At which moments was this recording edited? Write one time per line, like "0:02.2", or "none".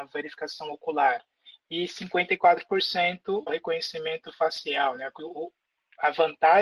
0:03.5
0:05.2